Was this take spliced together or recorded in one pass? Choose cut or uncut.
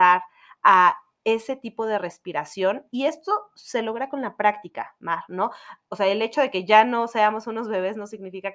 uncut